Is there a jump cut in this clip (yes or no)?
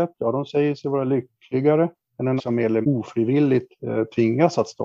yes